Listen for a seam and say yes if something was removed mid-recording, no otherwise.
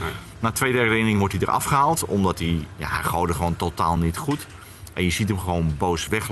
no